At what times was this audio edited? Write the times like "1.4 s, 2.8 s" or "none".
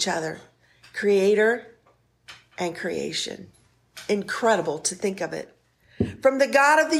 none